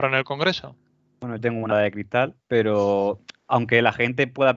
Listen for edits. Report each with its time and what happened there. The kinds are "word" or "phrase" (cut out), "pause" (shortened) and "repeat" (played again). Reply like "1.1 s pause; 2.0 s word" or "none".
1.4 s phrase; 1.7 s word; 2.4 s pause